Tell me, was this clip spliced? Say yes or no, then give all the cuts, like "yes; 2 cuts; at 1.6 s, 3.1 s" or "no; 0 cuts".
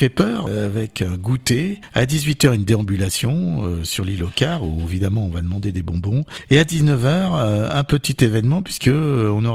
no; 0 cuts